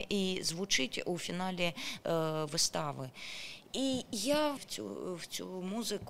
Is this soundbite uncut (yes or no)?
no